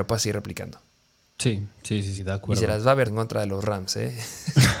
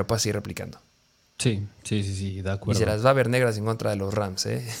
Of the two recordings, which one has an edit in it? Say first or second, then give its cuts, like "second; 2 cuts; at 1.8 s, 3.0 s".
first; 2 cuts; at 2.2 s, 3.1 s